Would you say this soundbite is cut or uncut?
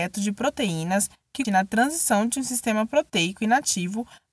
cut